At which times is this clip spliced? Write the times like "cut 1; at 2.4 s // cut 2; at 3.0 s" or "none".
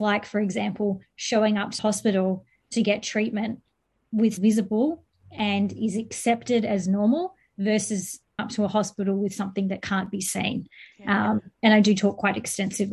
cut 1; at 1.8 s // cut 2; at 4.4 s // cut 3; at 8.4 s